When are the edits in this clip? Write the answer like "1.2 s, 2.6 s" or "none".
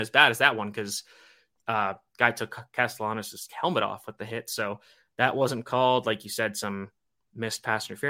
none